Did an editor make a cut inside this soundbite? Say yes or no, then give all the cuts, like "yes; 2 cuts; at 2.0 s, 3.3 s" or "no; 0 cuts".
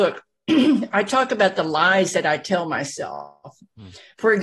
no; 0 cuts